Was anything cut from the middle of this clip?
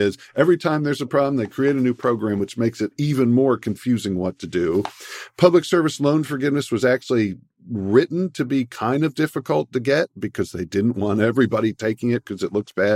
no; 0 cuts

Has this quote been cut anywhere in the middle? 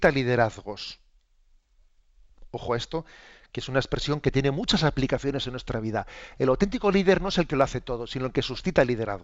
no; 0 cuts

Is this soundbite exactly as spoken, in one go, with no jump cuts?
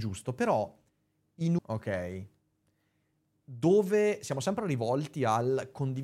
no; 1 cut; at 1.6 s

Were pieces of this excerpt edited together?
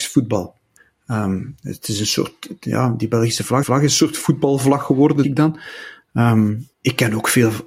yes; 3 cuts; at 3.6 s, 5.2 s, 6.7 s

